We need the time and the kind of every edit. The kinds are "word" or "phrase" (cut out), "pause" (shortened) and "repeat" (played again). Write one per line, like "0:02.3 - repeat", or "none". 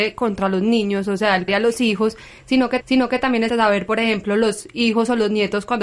0:01.5 - word
0:02.8 - repeat
0:03.5 - word